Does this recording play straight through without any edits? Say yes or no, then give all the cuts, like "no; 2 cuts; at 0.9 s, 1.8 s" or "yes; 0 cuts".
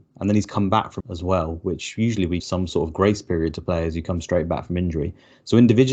no; 2 cuts; at 1.0 s, 2.4 s